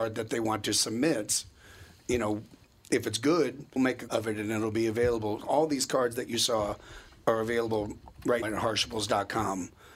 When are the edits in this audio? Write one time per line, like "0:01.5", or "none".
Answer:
0:03.8
0:04.1
0:05.4
0:08.4